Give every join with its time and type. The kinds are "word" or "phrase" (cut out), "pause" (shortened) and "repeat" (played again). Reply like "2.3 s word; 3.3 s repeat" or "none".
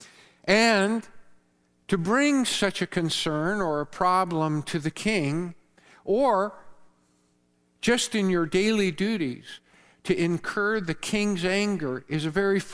none